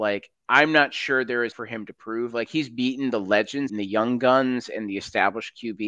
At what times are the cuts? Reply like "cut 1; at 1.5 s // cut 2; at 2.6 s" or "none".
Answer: cut 1; at 1.5 s // cut 2; at 3.7 s